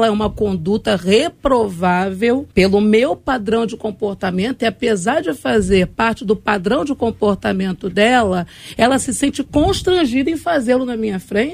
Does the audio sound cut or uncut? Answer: cut